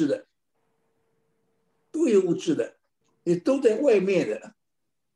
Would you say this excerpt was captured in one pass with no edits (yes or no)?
no